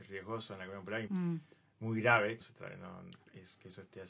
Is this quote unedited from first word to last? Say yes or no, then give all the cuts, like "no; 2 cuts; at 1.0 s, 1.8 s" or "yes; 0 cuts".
no; 2 cuts; at 1.1 s, 2.4 s